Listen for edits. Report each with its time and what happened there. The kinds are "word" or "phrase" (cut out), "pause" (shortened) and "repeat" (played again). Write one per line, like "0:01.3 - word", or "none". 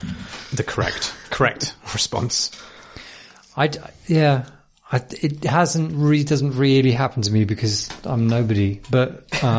none